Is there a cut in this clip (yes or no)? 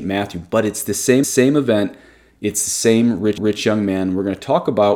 yes